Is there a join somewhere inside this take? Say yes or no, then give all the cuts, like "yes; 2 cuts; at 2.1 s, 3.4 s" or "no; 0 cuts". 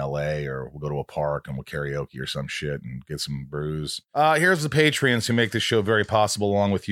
no; 0 cuts